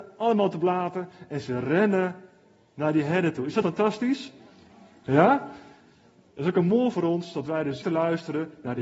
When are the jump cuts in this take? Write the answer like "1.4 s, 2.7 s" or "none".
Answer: 3.6 s, 6.9 s, 7.8 s